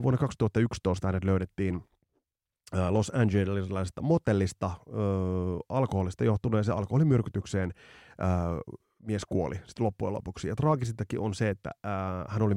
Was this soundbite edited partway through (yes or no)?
no